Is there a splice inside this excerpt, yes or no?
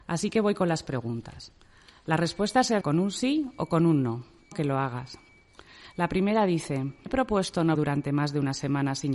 yes